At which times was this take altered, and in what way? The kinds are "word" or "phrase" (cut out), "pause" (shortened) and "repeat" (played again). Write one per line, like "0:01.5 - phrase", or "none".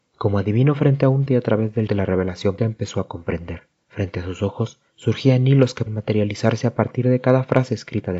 0:01.3 - word
0:01.9 - word
0:02.6 - word
0:03.8 - pause
0:04.9 - pause
0:05.9 - word